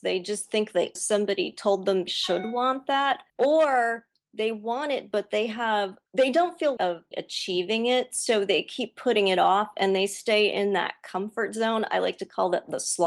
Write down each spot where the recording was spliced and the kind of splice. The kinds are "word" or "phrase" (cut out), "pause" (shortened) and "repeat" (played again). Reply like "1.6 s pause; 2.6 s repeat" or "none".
1.0 s phrase; 2.1 s word; 3.3 s pause; 6.1 s pause; 6.8 s word; 7.1 s word